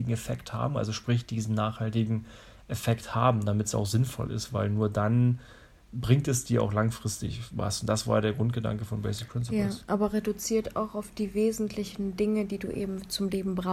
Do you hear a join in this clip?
no; 0 cuts

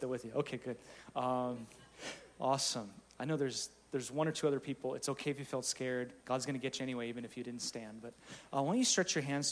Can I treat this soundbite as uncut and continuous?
no; 1 cut; at 6.2 s

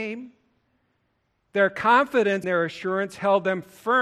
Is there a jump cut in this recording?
yes; 1 cut; at 2.4 s

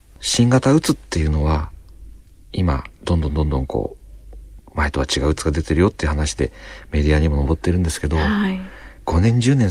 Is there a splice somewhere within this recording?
no; 0 cuts

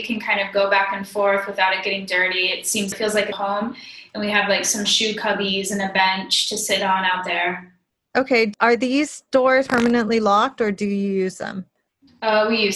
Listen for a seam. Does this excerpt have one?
yes; 2 cuts; at 2.9 s, 3.3 s

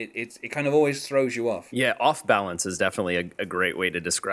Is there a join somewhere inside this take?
no; 0 cuts

